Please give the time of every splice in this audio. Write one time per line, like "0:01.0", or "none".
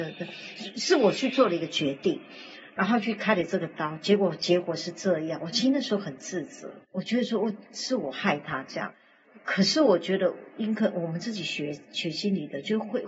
0:06.8